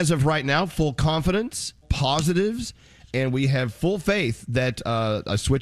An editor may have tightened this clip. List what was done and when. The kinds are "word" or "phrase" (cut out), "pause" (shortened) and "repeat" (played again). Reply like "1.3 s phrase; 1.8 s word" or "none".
1.8 s word